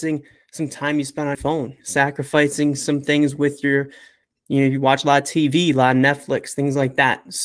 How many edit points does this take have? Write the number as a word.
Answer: one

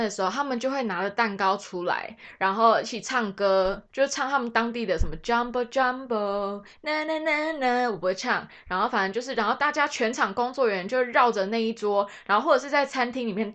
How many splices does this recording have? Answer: one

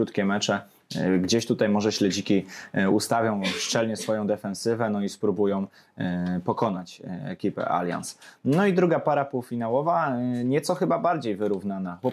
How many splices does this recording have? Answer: zero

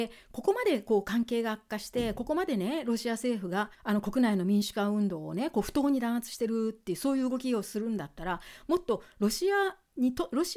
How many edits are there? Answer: one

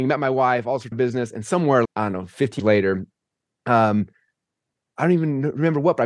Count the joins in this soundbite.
three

